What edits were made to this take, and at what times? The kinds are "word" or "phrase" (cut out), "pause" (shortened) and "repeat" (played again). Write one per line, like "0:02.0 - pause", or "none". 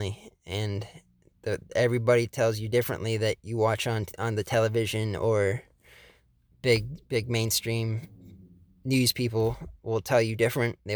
none